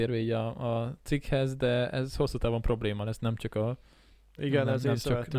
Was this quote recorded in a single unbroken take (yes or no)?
yes